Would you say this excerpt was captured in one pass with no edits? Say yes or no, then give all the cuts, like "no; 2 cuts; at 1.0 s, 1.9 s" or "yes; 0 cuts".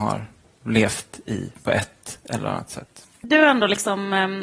yes; 0 cuts